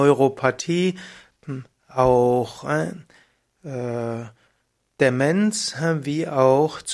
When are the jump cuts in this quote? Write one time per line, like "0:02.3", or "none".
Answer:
none